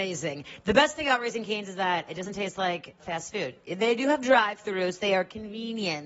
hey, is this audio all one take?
no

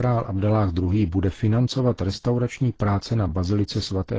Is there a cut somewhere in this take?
no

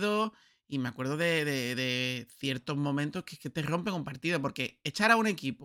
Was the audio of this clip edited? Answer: no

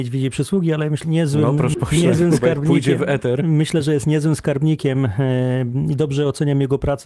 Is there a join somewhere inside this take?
yes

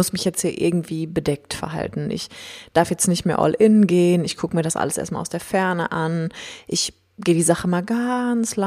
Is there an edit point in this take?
no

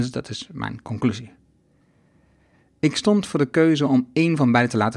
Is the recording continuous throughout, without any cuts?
yes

